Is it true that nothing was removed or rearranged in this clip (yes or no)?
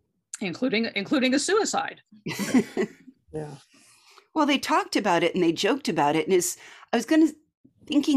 yes